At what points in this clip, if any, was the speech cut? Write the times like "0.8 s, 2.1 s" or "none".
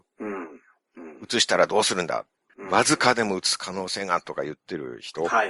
2.5 s

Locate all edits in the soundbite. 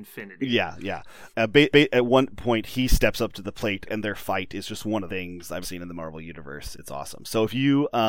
1.3 s, 1.7 s, 3.9 s, 5.1 s, 5.6 s, 6.7 s

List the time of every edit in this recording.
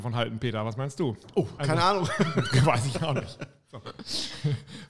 1.6 s

